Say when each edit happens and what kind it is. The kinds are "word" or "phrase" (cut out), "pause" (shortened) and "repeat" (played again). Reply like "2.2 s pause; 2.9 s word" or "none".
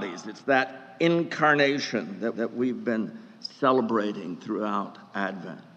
2.3 s repeat